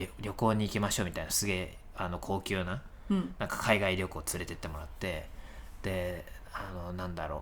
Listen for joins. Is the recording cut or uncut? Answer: uncut